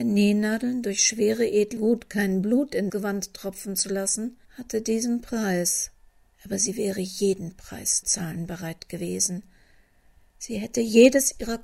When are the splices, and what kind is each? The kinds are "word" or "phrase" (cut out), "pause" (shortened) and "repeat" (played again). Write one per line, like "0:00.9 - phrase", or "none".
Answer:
0:01.8 - phrase
0:02.9 - word
0:04.4 - pause
0:06.1 - pause
0:08.0 - word